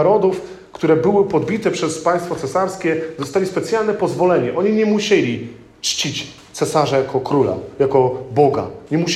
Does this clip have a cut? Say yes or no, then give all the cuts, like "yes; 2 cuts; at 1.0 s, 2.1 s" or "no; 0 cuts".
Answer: no; 0 cuts